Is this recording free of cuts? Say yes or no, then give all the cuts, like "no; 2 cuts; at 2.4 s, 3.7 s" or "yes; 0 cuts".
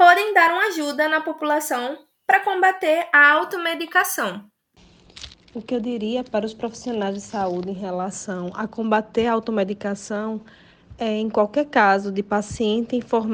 yes; 0 cuts